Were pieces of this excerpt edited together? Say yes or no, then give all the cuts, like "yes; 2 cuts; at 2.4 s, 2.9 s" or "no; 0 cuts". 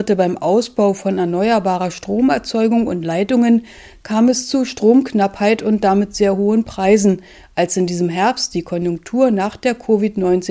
no; 0 cuts